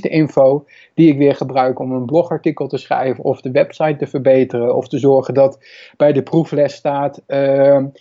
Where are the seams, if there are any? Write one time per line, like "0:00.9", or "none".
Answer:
none